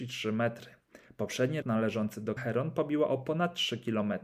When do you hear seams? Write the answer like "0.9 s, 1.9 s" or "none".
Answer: 1.6 s, 2.4 s